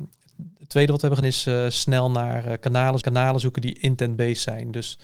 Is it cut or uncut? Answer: cut